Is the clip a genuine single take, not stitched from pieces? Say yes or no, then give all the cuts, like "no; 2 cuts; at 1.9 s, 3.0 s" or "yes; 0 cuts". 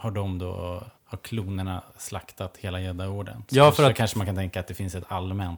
no; 1 cut; at 1.0 s